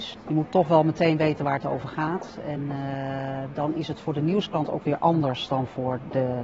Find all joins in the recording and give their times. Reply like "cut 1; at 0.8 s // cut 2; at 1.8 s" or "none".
none